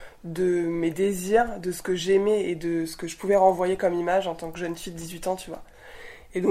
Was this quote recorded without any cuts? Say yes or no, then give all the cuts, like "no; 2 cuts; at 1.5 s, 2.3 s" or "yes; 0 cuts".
yes; 0 cuts